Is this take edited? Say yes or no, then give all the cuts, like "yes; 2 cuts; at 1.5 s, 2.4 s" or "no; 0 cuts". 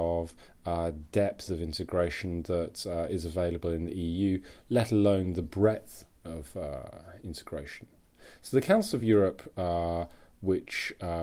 no; 0 cuts